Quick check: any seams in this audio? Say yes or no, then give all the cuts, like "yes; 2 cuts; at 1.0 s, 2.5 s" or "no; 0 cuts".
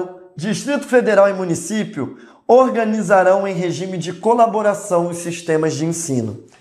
no; 0 cuts